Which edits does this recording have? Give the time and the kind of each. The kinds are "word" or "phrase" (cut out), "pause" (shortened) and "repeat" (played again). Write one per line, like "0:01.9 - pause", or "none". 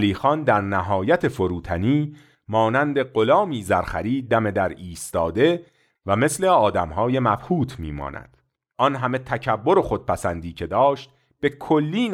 none